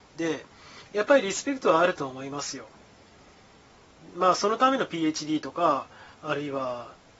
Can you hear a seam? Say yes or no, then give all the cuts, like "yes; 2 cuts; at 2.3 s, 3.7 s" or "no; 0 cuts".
yes; 1 cut; at 6.1 s